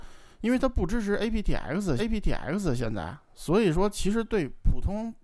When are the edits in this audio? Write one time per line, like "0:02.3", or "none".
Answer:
0:02.0